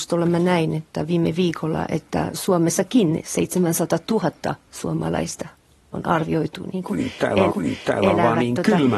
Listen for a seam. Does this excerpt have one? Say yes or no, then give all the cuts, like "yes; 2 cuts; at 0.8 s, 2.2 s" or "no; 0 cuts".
yes; 1 cut; at 7.5 s